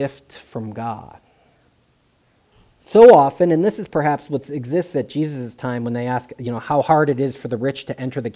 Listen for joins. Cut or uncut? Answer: uncut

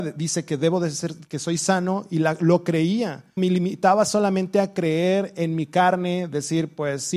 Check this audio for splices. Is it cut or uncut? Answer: cut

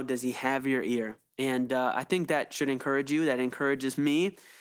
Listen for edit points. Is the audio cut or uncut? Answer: uncut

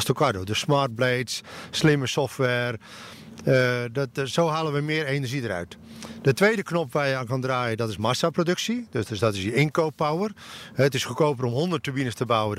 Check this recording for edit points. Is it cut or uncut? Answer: uncut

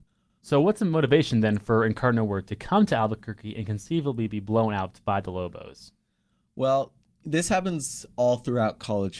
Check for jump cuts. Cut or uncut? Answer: uncut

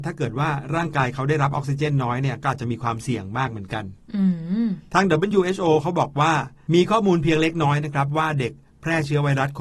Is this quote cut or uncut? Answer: uncut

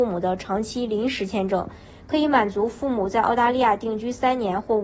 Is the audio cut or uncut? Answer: uncut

